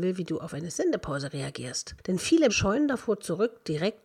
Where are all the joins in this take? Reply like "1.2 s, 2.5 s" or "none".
2.5 s